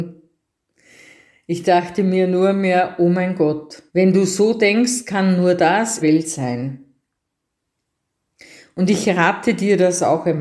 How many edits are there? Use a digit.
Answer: 2